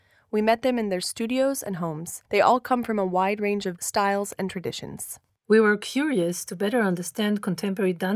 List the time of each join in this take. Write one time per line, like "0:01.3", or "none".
0:02.3
0:03.8
0:05.3